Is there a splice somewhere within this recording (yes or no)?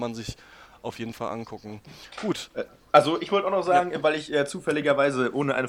no